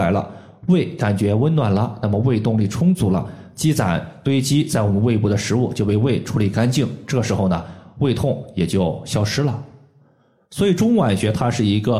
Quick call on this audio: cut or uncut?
uncut